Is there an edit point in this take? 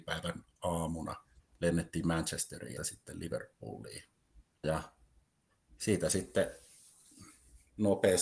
yes; 3 cuts; at 1.4 s, 2.8 s, 4.6 s

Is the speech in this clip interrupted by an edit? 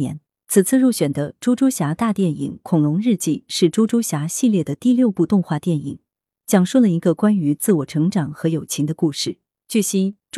no; 0 cuts

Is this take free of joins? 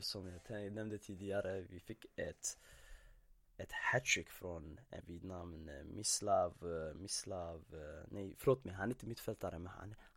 no; 1 cut; at 5.0 s

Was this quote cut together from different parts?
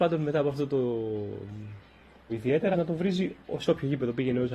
yes; 2 cuts; at 2.3 s, 2.7 s

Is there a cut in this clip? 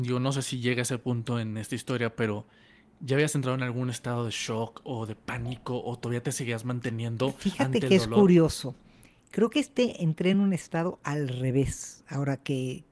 no; 0 cuts

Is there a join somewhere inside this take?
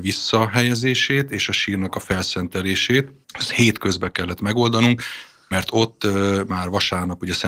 yes; 1 cut; at 3.2 s

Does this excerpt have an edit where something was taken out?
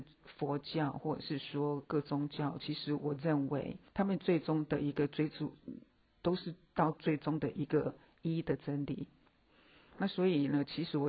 yes; 1 cut; at 3.9 s

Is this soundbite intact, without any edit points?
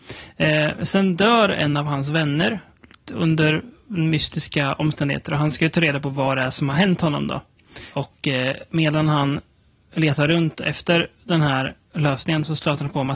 yes; 0 cuts

